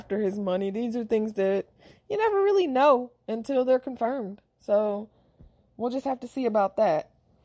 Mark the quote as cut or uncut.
uncut